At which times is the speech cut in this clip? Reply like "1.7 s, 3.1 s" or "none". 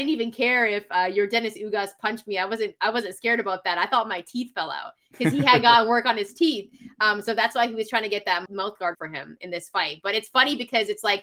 8.5 s, 8.9 s